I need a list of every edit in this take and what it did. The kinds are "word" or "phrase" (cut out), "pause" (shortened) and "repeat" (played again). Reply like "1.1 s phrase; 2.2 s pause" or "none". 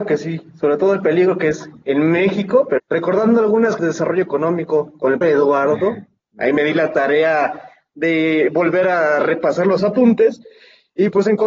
2.8 s word; 3.8 s word; 5.2 s word